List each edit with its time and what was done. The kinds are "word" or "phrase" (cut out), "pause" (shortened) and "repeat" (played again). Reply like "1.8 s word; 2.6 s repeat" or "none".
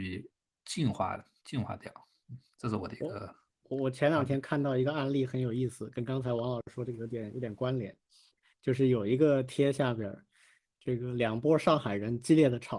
none

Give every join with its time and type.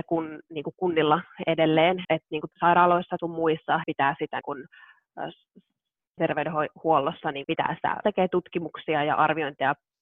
2.0 s word; 2.5 s word; 3.2 s word; 3.8 s word; 4.4 s word; 6.2 s word; 7.4 s word; 8.0 s word

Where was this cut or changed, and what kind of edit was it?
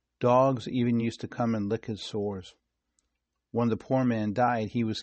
none

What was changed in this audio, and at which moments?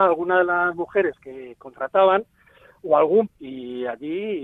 3.3 s word

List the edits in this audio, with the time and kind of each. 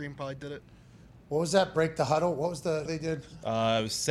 2.9 s word

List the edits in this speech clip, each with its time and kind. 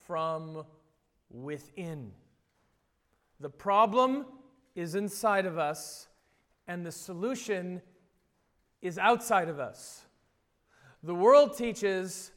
none

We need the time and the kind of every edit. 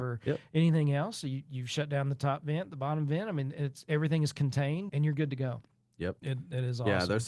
4.9 s word; 6.2 s word

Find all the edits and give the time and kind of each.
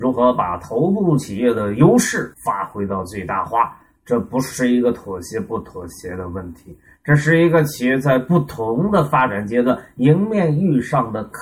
2.3 s pause

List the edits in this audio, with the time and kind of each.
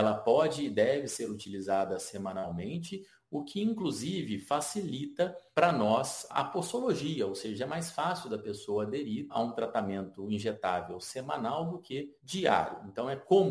none

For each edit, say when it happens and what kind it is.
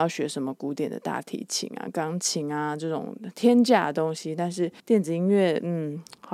4.8 s pause

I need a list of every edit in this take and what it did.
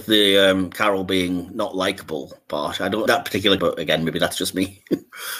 3.1 s word; 3.6 s word

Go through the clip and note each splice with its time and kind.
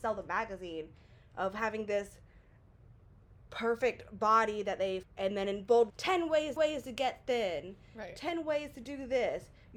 5.0 s word; 5.9 s phrase; 6.6 s repeat

